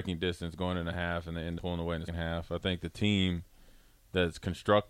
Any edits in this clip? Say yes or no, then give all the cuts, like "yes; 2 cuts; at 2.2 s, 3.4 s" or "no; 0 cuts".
yes; 2 cuts; at 1.6 s, 2.1 s